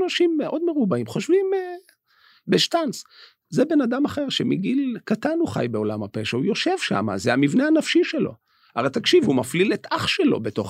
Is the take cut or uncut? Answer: uncut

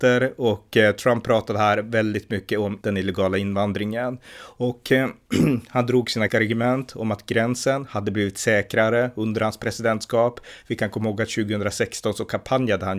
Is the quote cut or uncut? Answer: cut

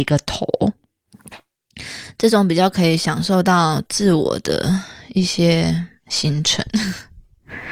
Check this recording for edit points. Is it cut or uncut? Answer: uncut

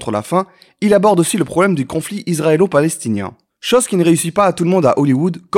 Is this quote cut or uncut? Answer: uncut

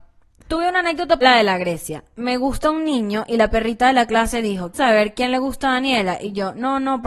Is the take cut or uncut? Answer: cut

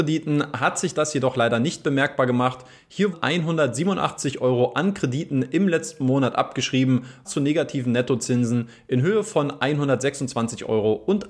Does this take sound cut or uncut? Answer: cut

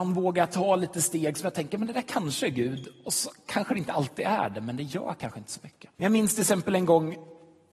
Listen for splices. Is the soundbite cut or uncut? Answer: cut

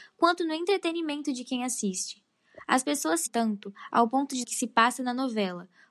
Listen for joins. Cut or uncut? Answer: cut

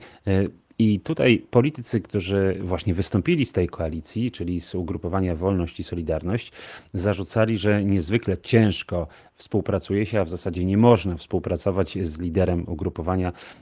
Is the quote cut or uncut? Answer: uncut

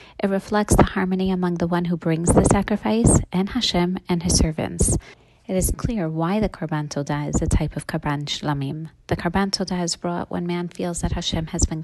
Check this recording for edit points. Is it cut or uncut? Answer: cut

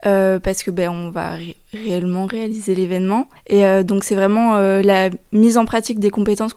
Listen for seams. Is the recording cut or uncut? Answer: uncut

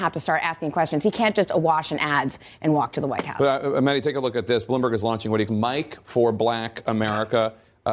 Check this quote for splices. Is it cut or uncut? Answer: cut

